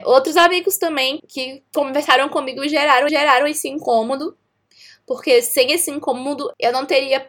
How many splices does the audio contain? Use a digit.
2